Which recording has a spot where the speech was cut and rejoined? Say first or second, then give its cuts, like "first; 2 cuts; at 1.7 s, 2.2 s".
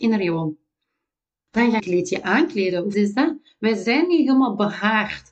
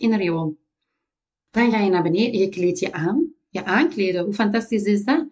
first; 3 cuts; at 1.8 s, 2.2 s, 2.9 s